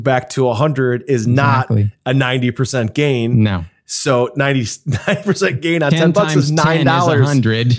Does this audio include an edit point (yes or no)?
no